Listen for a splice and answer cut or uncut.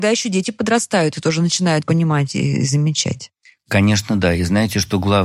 cut